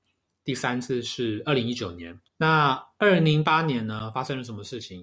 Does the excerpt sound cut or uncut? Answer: cut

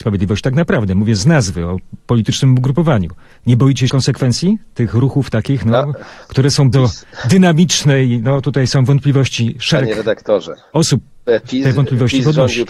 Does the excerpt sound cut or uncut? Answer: cut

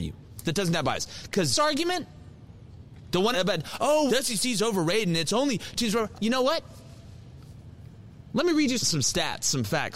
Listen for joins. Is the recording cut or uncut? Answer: cut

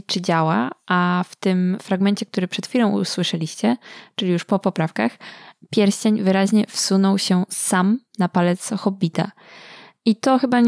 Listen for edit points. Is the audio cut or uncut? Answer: uncut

